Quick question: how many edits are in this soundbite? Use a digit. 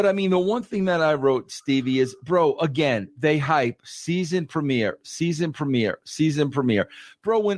0